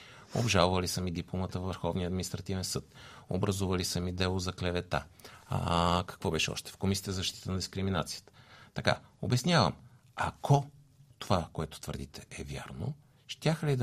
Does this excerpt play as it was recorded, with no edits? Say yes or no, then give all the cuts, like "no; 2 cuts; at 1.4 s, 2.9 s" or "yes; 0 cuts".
yes; 0 cuts